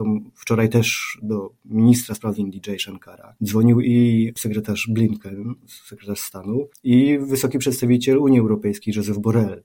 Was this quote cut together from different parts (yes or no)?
yes